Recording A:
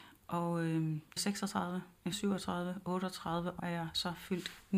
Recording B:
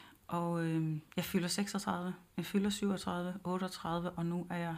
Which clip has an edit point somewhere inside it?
A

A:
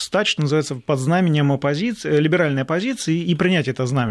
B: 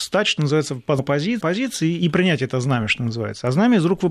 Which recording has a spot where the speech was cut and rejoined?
B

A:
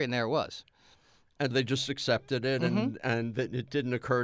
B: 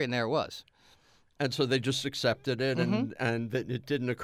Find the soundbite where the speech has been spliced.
A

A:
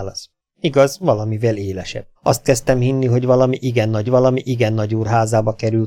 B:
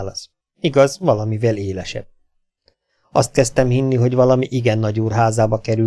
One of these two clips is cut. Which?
A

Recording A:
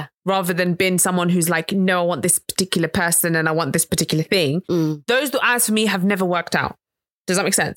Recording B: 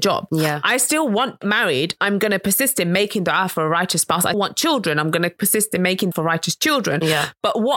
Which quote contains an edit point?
B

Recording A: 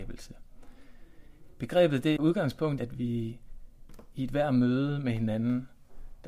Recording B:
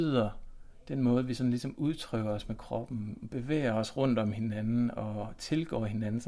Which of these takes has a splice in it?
A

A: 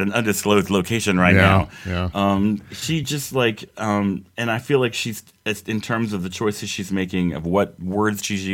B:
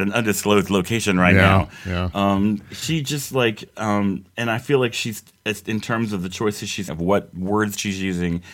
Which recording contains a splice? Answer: B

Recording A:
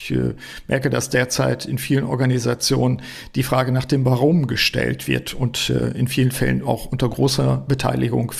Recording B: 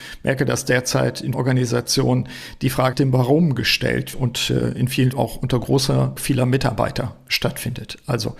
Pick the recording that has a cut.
B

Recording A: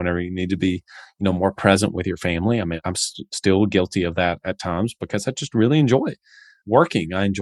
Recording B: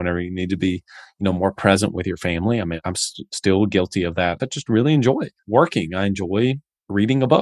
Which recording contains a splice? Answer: B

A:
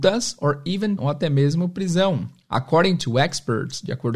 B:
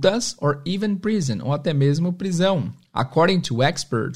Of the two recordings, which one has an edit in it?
A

